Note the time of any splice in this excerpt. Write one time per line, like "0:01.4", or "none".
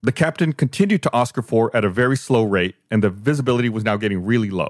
none